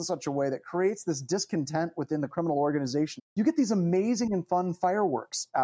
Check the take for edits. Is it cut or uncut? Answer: cut